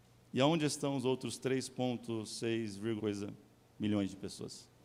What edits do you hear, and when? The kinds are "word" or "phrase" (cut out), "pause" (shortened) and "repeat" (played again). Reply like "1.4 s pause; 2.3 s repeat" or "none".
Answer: 3.0 s word